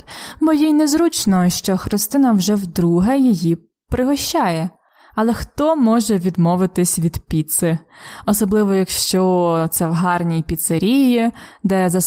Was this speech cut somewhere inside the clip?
no; 0 cuts

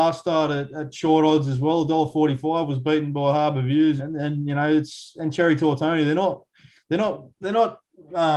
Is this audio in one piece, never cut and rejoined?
no; 1 cut; at 4.0 s

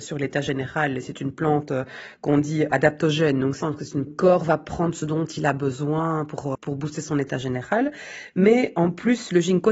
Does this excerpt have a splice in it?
yes; 3 cuts; at 3.6 s, 4.1 s, 6.5 s

